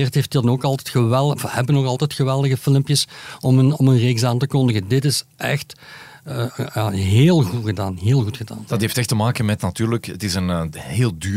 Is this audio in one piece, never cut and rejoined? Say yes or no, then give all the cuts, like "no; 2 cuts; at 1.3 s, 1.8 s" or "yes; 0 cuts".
yes; 0 cuts